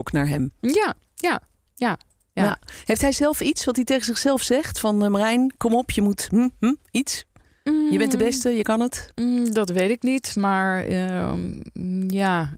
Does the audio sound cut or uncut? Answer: uncut